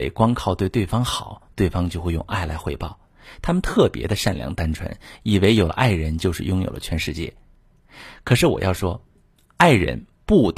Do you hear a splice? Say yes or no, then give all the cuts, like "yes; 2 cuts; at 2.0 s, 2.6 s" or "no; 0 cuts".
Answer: no; 0 cuts